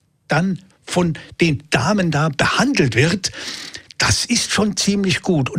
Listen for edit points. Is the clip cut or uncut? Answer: uncut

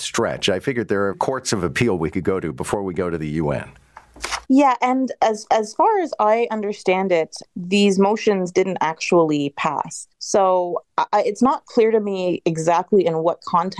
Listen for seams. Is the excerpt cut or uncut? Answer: cut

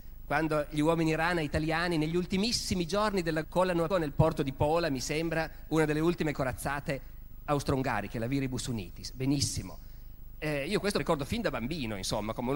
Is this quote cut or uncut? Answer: cut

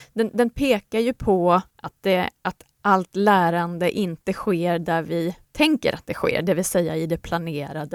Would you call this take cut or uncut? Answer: cut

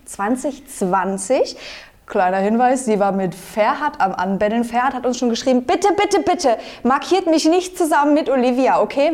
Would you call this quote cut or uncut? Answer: uncut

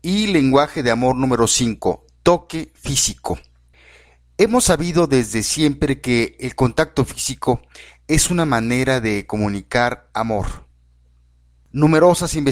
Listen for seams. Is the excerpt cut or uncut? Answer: uncut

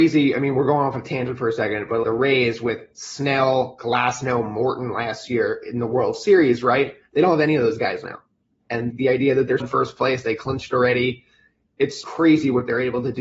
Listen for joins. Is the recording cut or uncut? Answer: cut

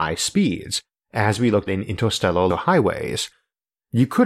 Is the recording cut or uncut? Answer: cut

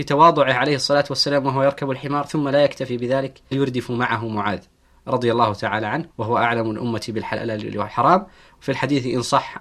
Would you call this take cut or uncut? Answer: cut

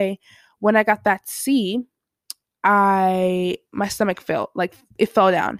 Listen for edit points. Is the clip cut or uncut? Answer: uncut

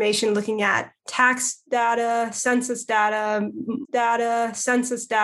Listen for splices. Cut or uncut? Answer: cut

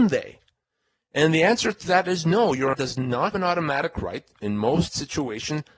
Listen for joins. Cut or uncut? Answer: cut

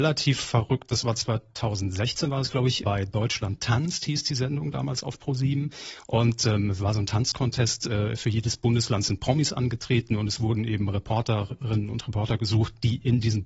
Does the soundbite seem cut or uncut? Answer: cut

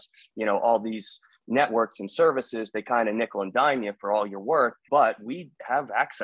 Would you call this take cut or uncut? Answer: cut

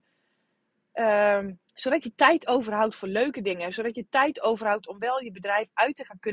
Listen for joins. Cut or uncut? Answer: cut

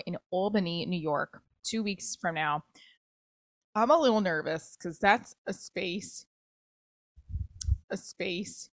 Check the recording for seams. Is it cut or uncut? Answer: cut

